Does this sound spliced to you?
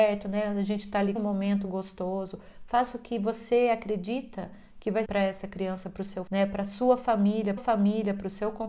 yes; 4 cuts; at 1.2 s, 5.1 s, 6.3 s, 7.6 s

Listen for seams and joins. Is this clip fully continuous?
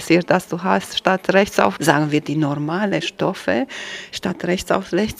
no; 1 cut; at 1.8 s

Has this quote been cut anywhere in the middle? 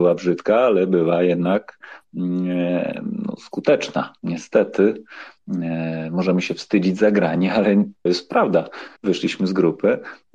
yes; 2 cuts; at 8.1 s, 9.0 s

